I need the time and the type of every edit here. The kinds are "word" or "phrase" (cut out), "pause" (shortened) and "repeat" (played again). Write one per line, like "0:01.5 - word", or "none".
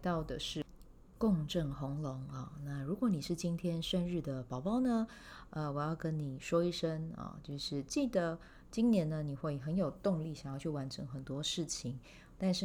none